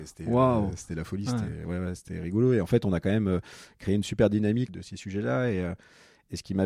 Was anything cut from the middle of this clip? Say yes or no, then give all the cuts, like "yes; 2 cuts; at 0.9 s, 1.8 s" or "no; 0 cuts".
yes; 1 cut; at 4.7 s